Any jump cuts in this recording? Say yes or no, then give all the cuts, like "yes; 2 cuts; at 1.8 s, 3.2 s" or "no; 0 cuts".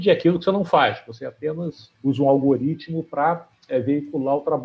yes; 1 cut; at 1.9 s